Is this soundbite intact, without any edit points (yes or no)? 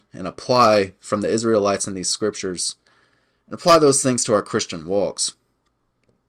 yes